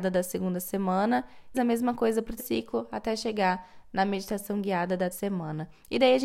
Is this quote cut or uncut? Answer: cut